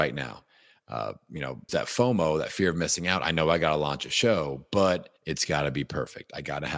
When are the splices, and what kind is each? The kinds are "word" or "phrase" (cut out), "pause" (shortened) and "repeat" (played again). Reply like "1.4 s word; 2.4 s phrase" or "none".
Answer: 1.7 s word; 5.2 s pause